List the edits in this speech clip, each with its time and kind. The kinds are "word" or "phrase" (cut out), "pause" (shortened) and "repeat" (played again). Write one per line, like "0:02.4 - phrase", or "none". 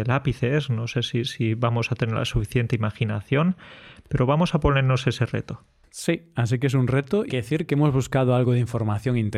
0:07.3 - phrase